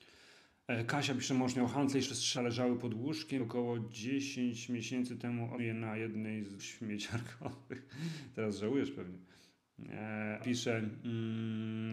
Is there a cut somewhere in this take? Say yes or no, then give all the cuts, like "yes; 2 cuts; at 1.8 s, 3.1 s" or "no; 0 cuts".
yes; 6 cuts; at 2.0 s, 2.3 s, 3.4 s, 5.6 s, 6.6 s, 10.4 s